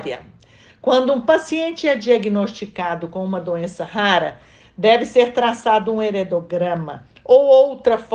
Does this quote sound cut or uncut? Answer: uncut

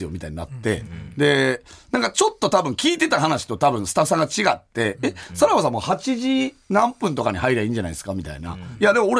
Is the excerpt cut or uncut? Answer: uncut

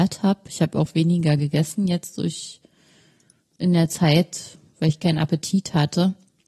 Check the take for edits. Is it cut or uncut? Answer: uncut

